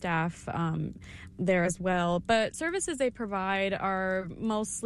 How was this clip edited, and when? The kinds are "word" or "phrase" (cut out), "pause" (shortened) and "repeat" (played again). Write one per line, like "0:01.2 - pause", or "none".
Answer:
0:01.3 - word
0:02.5 - word